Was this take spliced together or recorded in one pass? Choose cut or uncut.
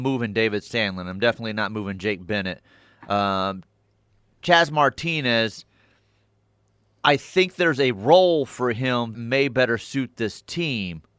cut